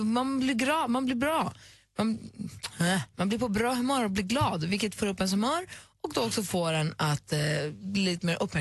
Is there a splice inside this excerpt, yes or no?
no